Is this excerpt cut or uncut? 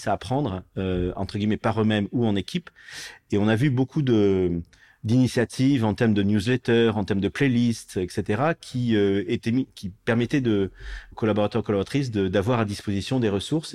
uncut